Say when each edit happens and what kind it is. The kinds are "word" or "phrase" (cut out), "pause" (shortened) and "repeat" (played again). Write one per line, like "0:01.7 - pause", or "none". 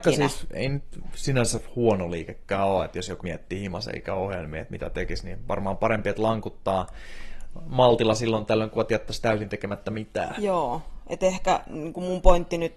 0:03.2 - word